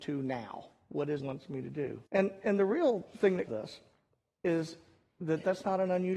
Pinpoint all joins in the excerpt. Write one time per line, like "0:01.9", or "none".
0:01.2
0:02.1
0:03.5